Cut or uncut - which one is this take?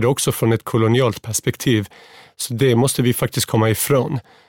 uncut